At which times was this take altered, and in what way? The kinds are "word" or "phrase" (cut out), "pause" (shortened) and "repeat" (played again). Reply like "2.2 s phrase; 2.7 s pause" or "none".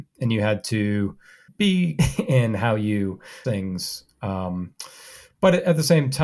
2.0 s word; 3.4 s word